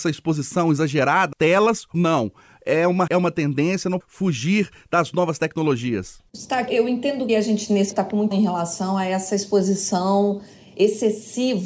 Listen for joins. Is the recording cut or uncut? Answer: cut